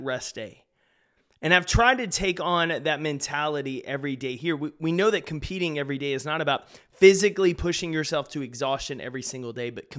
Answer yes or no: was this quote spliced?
no